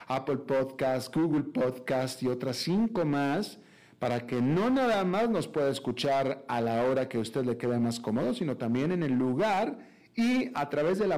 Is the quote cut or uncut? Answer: uncut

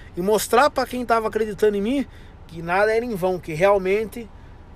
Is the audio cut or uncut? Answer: uncut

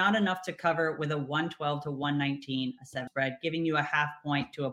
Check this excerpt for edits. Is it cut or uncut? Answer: cut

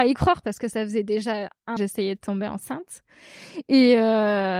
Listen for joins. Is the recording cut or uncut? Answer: cut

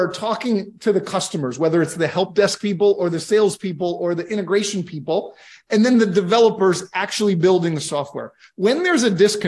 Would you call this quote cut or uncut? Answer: uncut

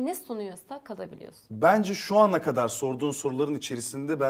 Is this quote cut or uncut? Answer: uncut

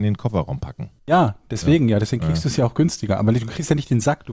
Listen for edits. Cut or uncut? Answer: cut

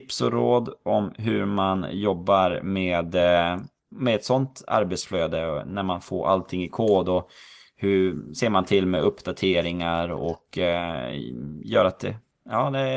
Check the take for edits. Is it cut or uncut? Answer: uncut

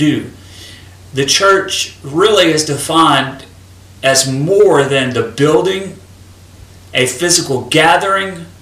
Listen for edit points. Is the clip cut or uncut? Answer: uncut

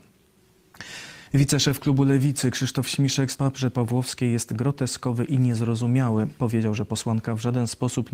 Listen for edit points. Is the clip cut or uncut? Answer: cut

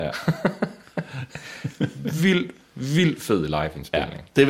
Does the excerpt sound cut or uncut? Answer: uncut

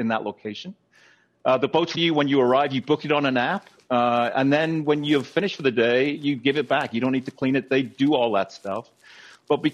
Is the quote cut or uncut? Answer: cut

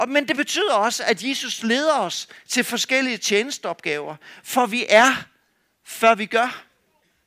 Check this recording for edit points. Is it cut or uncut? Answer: uncut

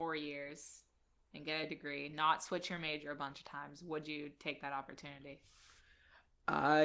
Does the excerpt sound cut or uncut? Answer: uncut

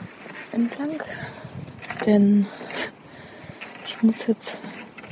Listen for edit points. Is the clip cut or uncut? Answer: uncut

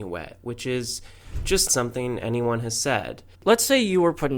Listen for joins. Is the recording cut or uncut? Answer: cut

